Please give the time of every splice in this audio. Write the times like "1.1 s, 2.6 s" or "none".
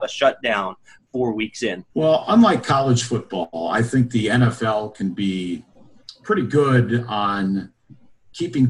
1.9 s